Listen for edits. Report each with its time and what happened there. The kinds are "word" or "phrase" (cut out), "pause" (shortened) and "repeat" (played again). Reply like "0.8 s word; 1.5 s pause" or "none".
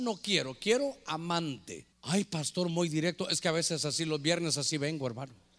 1.9 s pause